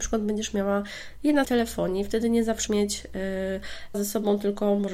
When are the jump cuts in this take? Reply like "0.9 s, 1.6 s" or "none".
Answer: 1.4 s, 2.7 s, 3.9 s